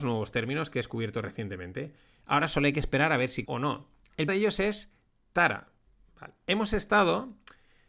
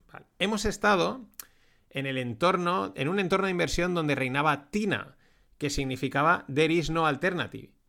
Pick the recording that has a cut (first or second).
first